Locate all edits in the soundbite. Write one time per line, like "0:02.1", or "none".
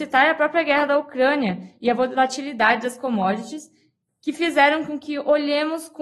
none